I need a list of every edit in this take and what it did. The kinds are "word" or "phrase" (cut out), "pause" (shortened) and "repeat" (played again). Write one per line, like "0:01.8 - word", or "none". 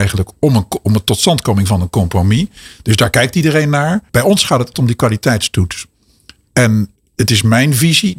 0:04.1 - pause
0:04.7 - word
0:07.0 - pause

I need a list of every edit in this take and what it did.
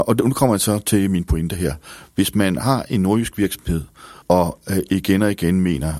0:04.2 - pause

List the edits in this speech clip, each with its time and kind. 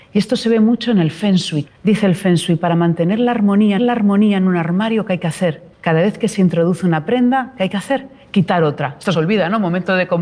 0:01.7 - pause
0:03.8 - repeat
0:05.7 - pause
0:09.1 - word

